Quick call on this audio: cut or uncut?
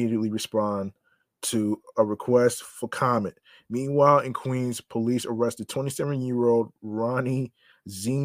uncut